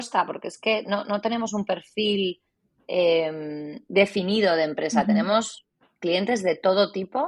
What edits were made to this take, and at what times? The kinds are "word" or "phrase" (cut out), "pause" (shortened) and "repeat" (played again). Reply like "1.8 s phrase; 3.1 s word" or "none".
none